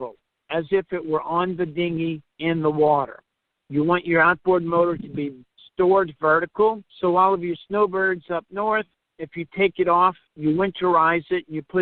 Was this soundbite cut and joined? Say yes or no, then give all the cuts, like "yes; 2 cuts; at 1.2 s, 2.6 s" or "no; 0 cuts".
yes; 1 cut; at 6.9 s